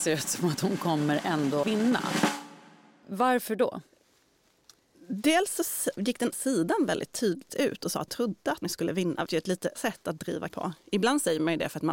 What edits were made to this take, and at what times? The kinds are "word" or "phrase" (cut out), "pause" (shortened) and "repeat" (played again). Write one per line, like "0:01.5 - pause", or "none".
0:01.6 - word
0:06.0 - word
0:06.3 - word
0:07.5 - word
0:08.1 - word
0:08.6 - word
0:09.3 - word
0:09.7 - word
0:10.5 - word